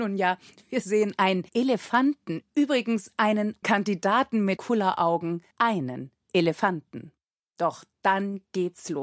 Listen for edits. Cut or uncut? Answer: cut